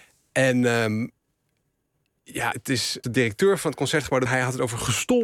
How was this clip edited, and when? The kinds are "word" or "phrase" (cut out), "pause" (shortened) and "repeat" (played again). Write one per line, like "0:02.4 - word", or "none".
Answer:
0:02.5 - word
0:03.0 - word
0:04.3 - word